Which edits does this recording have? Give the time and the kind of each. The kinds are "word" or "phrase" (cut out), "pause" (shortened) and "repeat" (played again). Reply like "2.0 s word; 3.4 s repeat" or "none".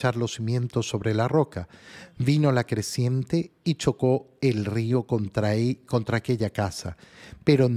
none